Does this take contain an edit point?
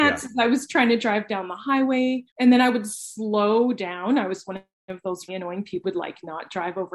yes; 3 cuts; at 2.3 s, 5.3 s, 5.8 s

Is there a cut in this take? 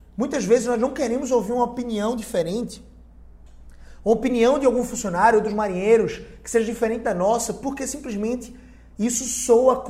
no; 0 cuts

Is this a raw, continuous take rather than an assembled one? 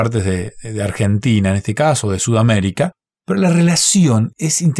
yes; 0 cuts

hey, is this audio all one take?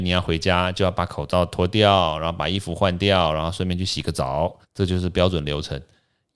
no; 1 cut; at 4.6 s

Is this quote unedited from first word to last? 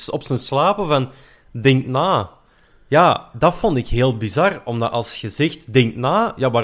yes; 0 cuts

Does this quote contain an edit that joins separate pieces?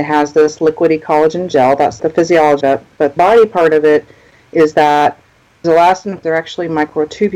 yes; 5 cuts; at 2.0 s, 2.6 s, 3.2 s, 5.6 s, 6.2 s

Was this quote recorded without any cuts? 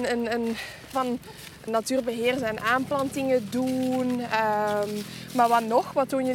no; 2 cuts; at 0.9 s, 1.7 s

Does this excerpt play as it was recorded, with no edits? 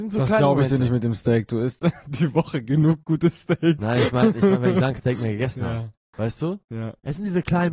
no; 1 cut; at 5.0 s

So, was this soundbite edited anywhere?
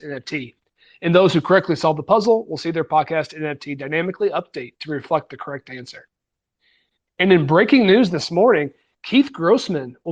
no; 0 cuts

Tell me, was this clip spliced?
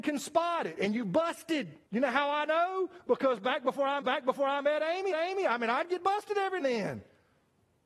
yes; 4 cuts; at 1.9 s, 4.0 s, 5.1 s, 6.6 s

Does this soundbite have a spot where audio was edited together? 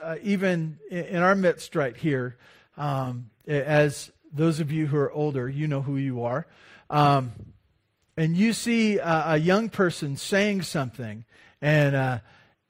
no; 0 cuts

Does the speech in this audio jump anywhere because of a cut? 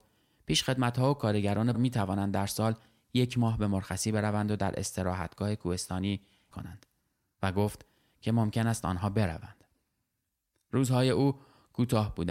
yes; 2 cuts; at 1.7 s, 6.5 s

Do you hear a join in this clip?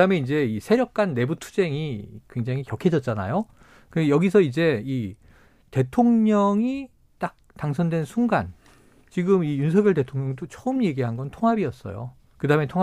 no; 0 cuts

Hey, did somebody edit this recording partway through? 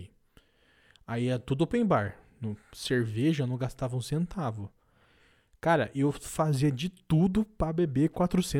no; 0 cuts

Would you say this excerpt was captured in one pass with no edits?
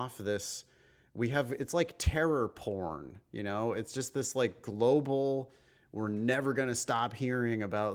yes; 0 cuts

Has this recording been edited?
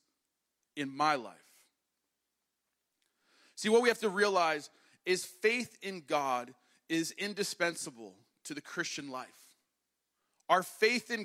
no; 0 cuts

